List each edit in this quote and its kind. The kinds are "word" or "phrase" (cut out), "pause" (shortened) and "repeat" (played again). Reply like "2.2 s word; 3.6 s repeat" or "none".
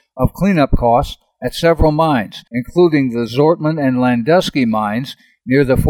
2.5 s pause

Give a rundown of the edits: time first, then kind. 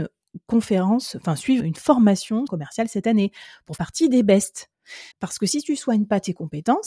1.6 s word; 2.5 s phrase; 3.8 s word; 5.1 s pause

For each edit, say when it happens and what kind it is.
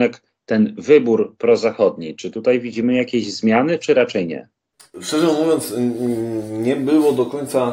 none

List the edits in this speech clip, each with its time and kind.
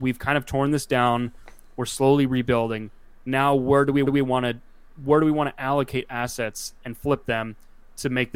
4.0 s repeat

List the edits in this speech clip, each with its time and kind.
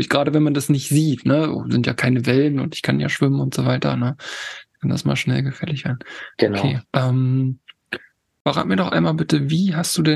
6.8 s pause

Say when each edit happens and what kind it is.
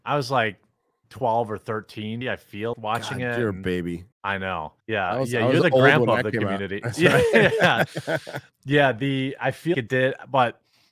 2.2 s word; 2.7 s word; 4.1 s pause; 4.8 s pause; 9.7 s word

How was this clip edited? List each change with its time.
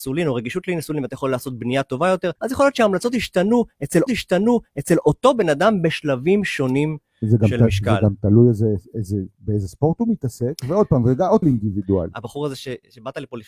2.4 s pause; 4.1 s repeat; 11.4 s phrase

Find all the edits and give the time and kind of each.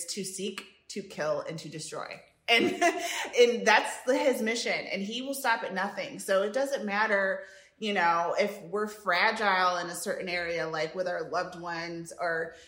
3.3 s word

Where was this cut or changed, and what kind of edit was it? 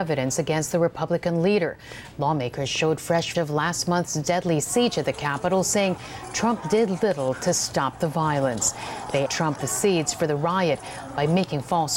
3.3 s word; 9.3 s word; 9.6 s word

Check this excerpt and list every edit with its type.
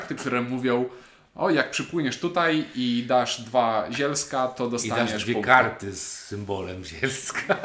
none

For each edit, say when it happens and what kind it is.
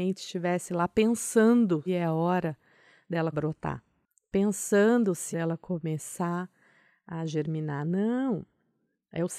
1.9 s word; 3.3 s phrase; 5.3 s phrase

